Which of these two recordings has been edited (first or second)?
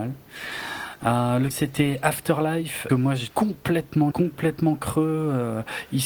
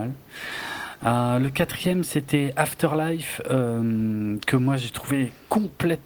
first